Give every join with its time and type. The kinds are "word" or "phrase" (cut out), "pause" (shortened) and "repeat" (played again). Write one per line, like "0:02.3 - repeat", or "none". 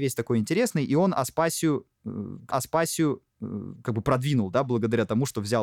0:02.5 - repeat